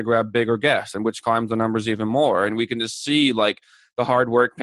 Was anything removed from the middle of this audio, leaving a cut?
no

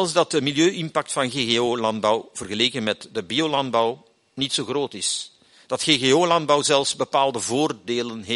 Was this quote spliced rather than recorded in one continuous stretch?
no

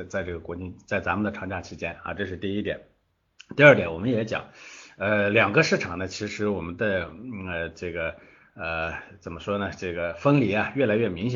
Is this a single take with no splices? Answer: yes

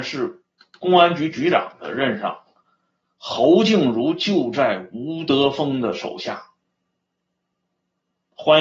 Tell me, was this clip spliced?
no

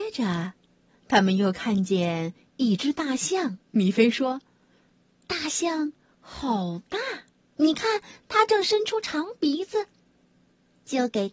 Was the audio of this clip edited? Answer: yes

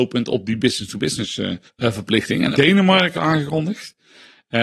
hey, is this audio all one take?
no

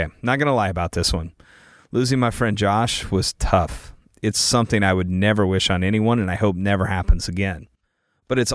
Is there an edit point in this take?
no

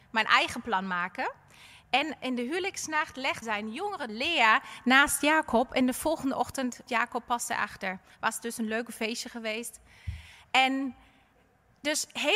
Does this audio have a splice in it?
yes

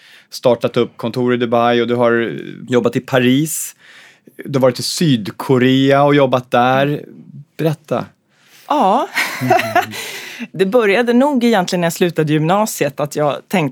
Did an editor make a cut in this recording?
no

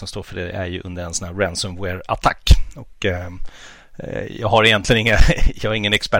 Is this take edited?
no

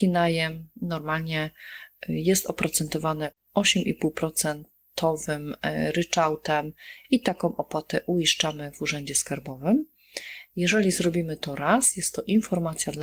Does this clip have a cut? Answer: no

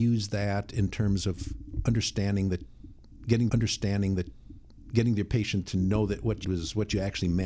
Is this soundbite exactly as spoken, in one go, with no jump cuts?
no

